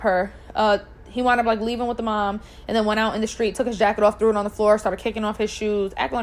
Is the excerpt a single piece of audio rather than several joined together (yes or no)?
yes